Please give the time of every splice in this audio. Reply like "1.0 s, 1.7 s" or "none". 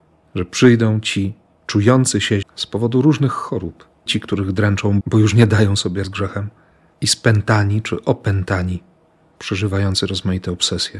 2.4 s, 4.1 s, 5.0 s, 6.0 s